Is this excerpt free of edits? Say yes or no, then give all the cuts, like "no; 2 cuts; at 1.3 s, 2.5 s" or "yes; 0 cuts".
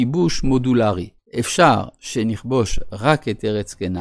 no; 1 cut; at 1.2 s